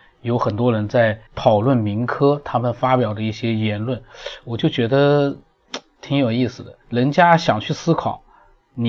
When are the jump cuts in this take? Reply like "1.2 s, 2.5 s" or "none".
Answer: 1.3 s, 6.8 s